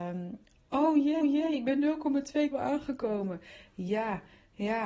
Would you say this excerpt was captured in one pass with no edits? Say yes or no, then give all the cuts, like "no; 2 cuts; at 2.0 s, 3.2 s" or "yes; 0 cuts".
no; 2 cuts; at 1.2 s, 2.5 s